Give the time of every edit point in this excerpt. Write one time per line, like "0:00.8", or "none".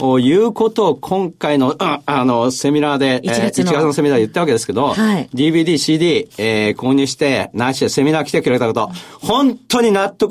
none

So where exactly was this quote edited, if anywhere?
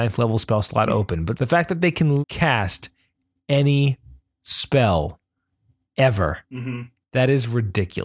0:01.4
0:02.2

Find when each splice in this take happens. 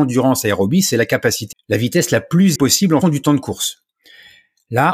0:01.5
0:02.6
0:03.0

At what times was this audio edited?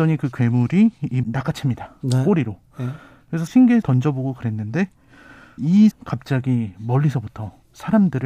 0:01.2
0:03.5
0:03.8
0:05.6
0:05.9

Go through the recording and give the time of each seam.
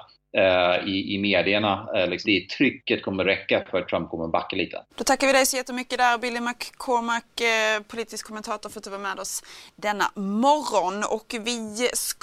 0:02.2
0:04.9

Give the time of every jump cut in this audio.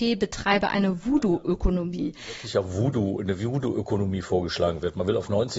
none

